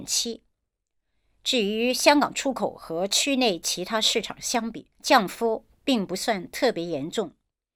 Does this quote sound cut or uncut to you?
cut